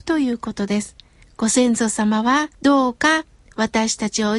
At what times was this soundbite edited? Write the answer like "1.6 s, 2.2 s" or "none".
1.2 s, 2.5 s

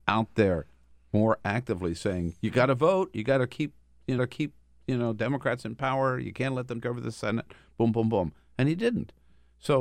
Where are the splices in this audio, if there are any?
4.2 s, 6.8 s

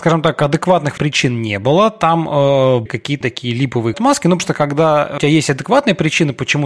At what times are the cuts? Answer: 1.0 s, 2.9 s, 3.2 s, 3.9 s, 4.4 s, 5.2 s

